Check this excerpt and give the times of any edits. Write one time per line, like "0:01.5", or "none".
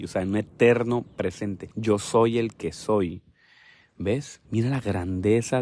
0:01.7
0:04.4